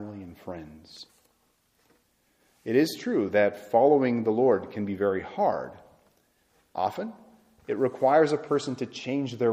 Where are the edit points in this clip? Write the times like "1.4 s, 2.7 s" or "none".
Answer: none